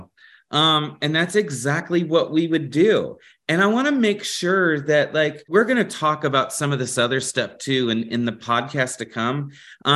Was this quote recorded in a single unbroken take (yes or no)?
yes